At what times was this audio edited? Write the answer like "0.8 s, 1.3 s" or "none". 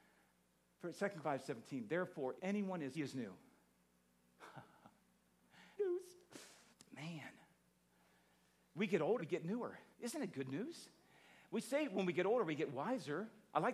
1.2 s, 2.4 s, 2.9 s, 5.8 s, 6.7 s, 9.2 s, 9.9 s